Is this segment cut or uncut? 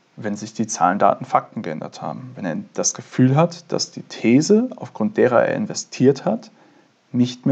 uncut